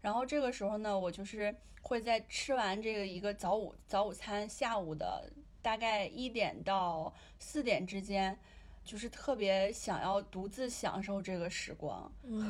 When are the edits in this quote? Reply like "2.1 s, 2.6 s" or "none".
8.9 s